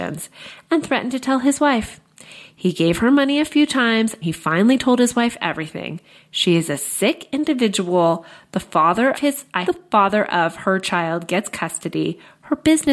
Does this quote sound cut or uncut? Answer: cut